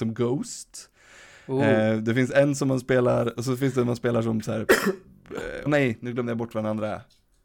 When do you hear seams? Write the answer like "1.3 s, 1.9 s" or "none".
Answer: 5.7 s